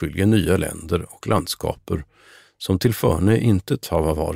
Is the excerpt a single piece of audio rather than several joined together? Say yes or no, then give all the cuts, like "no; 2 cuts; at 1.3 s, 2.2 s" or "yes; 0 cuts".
yes; 0 cuts